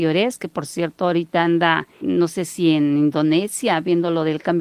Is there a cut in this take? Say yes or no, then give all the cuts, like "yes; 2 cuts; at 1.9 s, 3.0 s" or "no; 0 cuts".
yes; 1 cut; at 1.9 s